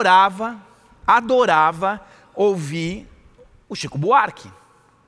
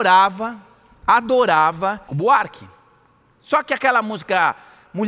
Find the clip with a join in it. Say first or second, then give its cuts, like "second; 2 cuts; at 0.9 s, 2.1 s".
second; 1 cut; at 2.1 s